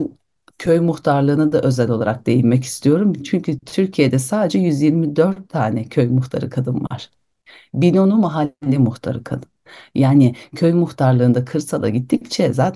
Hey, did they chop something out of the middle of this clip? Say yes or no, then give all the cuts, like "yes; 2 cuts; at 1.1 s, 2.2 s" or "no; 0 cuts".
no; 0 cuts